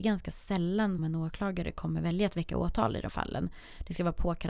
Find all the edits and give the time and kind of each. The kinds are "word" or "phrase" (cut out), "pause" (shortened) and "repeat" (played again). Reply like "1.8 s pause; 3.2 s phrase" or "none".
1.0 s word; 3.1 s word